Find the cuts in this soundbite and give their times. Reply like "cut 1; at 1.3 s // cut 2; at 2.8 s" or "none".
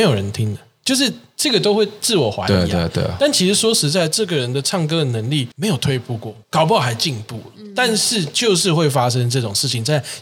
cut 1; at 5.5 s // cut 2; at 6.4 s